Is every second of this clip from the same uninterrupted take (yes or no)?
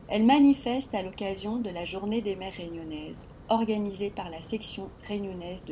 yes